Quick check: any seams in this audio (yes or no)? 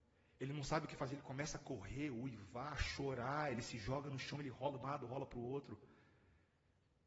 yes